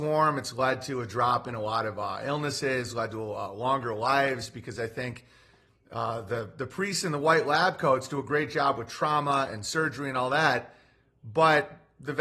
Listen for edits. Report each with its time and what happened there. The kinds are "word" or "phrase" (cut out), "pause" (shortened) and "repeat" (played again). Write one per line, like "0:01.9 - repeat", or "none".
none